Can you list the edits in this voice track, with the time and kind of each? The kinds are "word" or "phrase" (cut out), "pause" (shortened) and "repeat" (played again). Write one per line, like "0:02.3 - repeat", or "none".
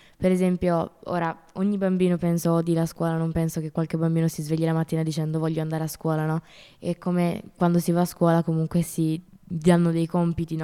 0:09.3 - pause